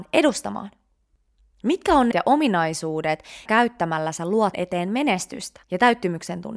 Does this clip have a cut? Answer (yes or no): yes